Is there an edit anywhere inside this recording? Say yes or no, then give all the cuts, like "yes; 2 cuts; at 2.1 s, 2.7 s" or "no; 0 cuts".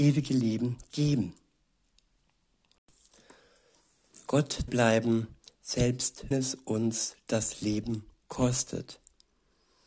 yes; 2 cuts; at 4.7 s, 6.3 s